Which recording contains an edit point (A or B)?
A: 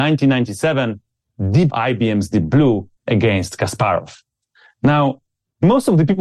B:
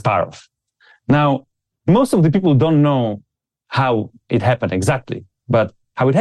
A